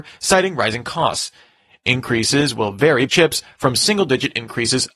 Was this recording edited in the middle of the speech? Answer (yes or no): yes